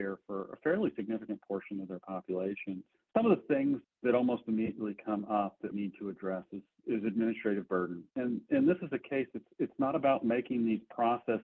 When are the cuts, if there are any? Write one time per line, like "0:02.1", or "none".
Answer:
0:02.9
0:03.8
0:05.7
0:08.1